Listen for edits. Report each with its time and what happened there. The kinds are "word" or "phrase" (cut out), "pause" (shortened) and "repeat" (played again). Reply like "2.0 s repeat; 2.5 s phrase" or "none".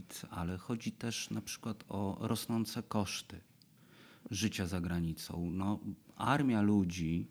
none